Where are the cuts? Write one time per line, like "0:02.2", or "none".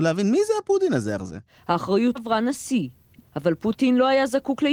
0:01.2
0:02.2